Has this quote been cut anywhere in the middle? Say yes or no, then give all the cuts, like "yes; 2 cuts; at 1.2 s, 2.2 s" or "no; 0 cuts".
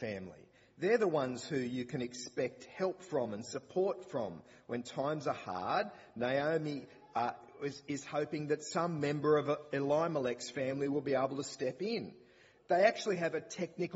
no; 0 cuts